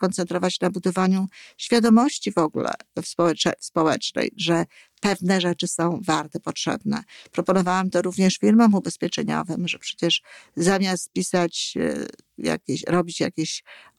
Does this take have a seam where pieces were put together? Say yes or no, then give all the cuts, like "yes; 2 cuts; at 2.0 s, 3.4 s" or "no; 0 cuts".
no; 0 cuts